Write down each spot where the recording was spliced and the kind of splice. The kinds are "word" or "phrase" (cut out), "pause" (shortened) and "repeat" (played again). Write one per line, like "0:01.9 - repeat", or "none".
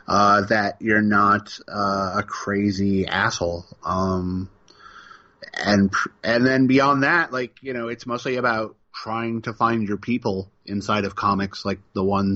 0:08.8 - pause